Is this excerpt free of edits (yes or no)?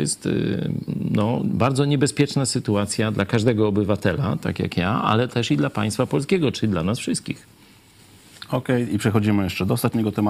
yes